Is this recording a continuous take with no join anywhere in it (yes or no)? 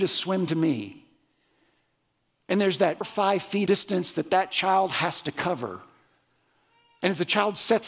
no